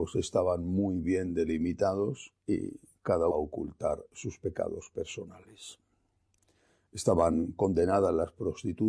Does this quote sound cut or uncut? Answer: cut